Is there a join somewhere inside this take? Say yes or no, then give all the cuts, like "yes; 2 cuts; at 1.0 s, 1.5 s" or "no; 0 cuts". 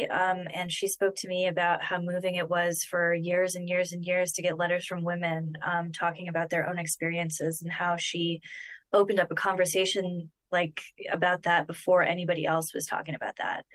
no; 0 cuts